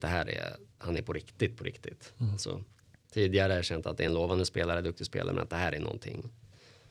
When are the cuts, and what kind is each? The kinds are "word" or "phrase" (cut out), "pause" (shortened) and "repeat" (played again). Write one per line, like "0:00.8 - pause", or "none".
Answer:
none